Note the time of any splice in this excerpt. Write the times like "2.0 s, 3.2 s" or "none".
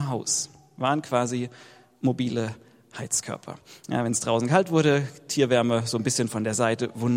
none